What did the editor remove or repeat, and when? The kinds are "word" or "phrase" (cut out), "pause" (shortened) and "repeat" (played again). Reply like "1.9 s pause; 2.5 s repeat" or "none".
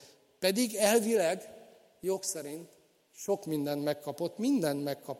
none